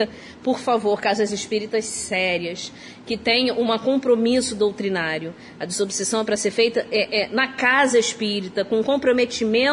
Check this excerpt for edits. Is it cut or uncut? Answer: uncut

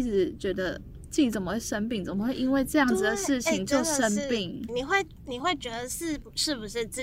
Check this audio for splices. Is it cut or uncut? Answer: cut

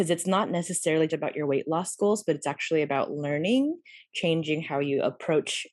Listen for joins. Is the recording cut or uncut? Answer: cut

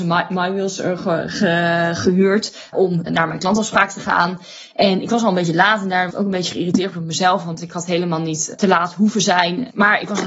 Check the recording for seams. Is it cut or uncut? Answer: cut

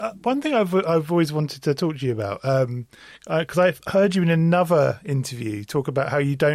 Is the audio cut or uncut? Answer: uncut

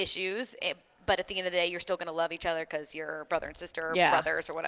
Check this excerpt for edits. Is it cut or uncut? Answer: uncut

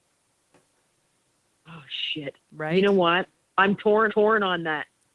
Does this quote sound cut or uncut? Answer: cut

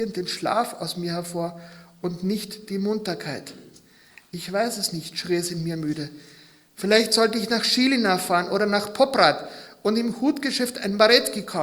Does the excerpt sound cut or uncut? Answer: uncut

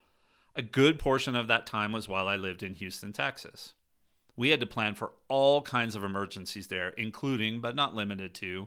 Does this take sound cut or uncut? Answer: uncut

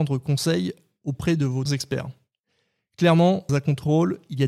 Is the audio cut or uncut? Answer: cut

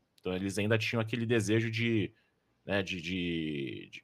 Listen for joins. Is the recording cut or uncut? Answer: uncut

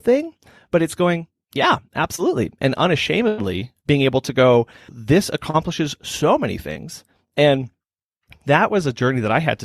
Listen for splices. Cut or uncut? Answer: uncut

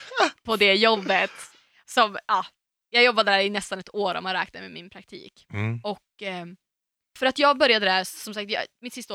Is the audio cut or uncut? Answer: uncut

